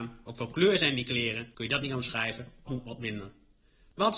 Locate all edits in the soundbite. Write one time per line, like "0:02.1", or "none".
0:02.7